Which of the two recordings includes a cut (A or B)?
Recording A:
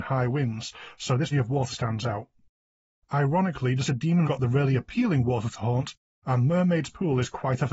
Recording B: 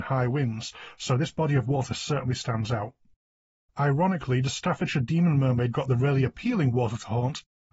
A